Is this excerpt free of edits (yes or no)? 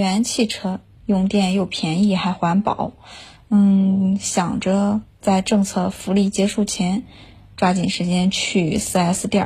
yes